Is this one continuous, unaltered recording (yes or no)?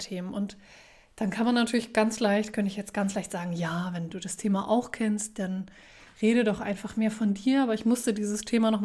yes